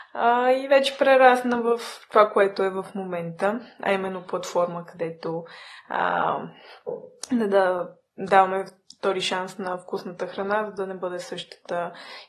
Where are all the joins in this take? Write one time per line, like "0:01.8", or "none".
none